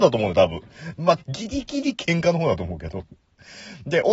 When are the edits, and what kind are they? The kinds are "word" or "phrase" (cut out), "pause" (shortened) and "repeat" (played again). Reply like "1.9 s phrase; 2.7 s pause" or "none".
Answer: 1.2 s phrase